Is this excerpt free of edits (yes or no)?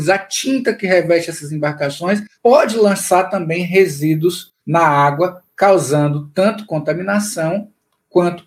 no